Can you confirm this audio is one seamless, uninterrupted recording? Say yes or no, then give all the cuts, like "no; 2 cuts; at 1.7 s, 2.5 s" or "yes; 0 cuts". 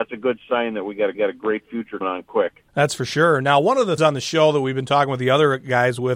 no; 4 cuts; at 1.1 s, 2.0 s, 2.7 s, 4.0 s